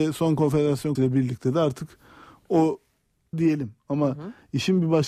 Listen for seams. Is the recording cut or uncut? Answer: cut